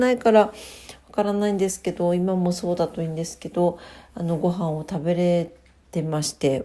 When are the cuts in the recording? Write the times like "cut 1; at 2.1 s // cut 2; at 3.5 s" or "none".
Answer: none

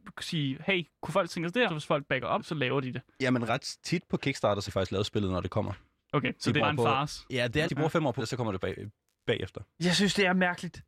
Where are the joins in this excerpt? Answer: cut 1; at 1.7 s // cut 2; at 2.4 s // cut 3; at 3.5 s // cut 4; at 4.7 s // cut 5; at 6.6 s // cut 6; at 7.7 s // cut 7; at 8.2 s // cut 8; at 8.6 s

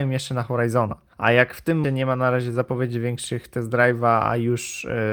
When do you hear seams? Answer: cut 1; at 1.1 s // cut 2; at 1.8 s

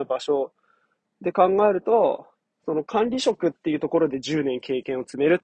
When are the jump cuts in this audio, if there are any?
cut 1; at 2.4 s

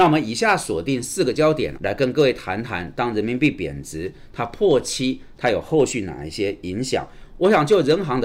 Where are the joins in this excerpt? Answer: cut 1; at 1.8 s

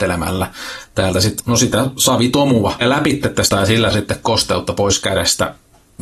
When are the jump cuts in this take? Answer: cut 1; at 1.4 s // cut 2; at 2.8 s // cut 3; at 3.5 s // cut 4; at 3.9 s

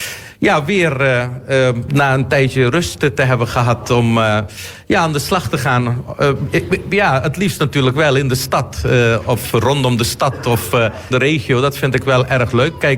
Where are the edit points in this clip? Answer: cut 1; at 1.9 s // cut 2; at 11.1 s

